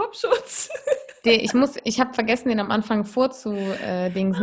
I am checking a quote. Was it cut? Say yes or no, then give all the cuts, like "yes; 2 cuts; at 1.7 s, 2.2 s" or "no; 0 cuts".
no; 0 cuts